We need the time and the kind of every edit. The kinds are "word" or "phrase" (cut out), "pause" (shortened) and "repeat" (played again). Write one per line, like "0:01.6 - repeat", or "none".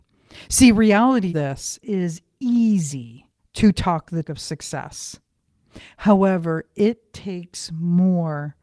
0:01.3 - word
0:01.8 - word
0:03.4 - pause
0:04.2 - word